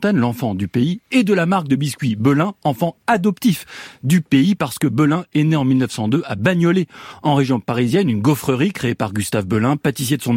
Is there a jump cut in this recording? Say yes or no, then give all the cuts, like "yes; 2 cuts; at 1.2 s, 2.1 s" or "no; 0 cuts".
no; 0 cuts